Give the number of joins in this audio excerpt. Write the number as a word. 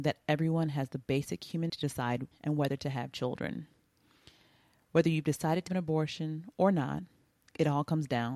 three